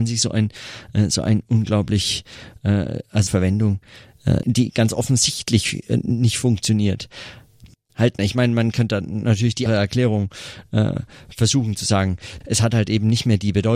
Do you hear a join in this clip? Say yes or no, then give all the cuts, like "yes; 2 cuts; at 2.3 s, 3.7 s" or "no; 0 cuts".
yes; 5 cuts; at 3.3 s, 4.4 s, 7.7 s, 9.7 s, 12.4 s